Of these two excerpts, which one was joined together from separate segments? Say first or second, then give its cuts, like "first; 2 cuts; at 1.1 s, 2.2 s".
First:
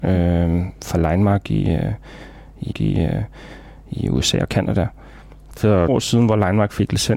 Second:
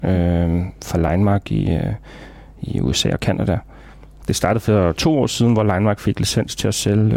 first; 3 cuts; at 2.7 s, 5.6 s, 5.9 s